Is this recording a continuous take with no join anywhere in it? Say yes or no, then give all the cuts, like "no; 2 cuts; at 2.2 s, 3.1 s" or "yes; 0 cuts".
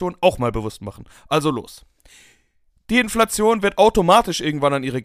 yes; 0 cuts